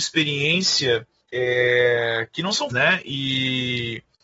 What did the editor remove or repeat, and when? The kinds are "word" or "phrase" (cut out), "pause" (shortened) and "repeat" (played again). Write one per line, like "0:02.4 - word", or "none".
0:01.2 - pause
0:02.7 - word